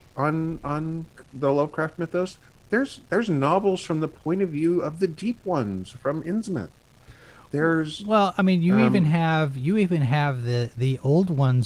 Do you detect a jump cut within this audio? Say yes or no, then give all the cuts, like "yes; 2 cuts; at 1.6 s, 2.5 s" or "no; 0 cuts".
no; 0 cuts